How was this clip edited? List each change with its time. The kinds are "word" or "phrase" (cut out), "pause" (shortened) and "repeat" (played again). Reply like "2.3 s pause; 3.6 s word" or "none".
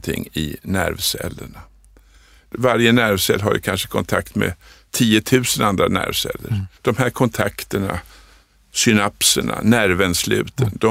6.7 s pause